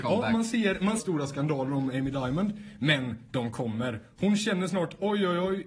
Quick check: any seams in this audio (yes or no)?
yes